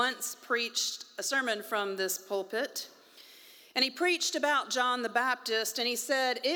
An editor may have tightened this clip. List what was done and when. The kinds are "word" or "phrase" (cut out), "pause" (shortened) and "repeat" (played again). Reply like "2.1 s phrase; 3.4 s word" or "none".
none